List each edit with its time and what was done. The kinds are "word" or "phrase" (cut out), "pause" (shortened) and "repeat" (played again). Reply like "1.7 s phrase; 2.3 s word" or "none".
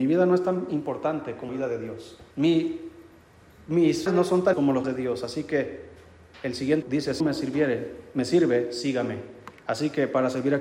1.5 s word; 2.3 s pause; 4.1 s word; 4.5 s word; 4.8 s word; 6.8 s word; 7.2 s word